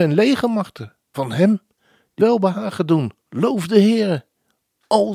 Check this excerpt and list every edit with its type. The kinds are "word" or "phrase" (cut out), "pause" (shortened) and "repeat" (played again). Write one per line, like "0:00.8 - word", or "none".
0:01.1 - word
0:02.2 - word
0:03.2 - pause